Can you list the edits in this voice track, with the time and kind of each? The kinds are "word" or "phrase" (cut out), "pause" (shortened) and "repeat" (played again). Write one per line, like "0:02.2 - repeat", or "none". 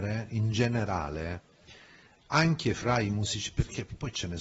none